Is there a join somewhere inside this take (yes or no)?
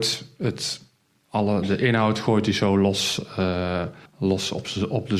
yes